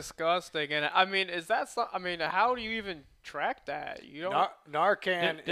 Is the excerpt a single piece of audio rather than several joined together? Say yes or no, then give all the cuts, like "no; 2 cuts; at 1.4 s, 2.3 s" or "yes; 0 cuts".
yes; 0 cuts